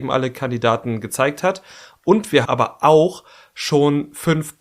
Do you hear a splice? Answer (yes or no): yes